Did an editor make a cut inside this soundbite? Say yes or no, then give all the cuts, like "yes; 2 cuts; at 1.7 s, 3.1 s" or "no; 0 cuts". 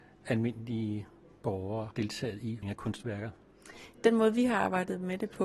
yes; 2 cuts; at 1.9 s, 2.6 s